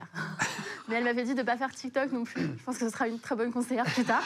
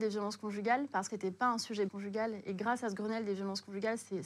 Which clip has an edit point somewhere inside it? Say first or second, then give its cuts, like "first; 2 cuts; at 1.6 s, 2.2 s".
second; 2 cuts; at 1.1 s, 1.9 s